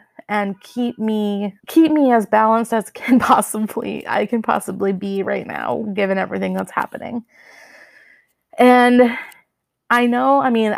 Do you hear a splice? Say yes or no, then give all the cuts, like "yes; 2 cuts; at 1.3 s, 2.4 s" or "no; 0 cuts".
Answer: yes; 1 cut; at 1.6 s